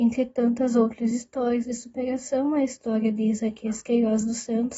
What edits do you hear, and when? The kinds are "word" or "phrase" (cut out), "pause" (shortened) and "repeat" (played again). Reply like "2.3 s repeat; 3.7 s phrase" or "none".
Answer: none